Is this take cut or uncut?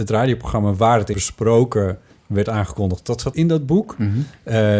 cut